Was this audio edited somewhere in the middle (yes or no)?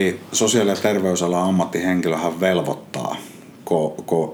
no